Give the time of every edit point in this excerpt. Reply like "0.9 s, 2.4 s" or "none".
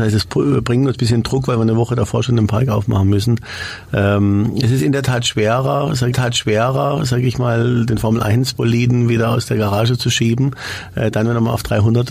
6.1 s